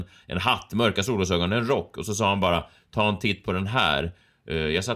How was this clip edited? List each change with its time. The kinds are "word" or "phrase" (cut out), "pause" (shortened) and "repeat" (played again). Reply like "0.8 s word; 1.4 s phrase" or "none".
none